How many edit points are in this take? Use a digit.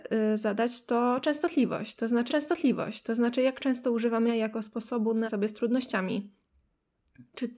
3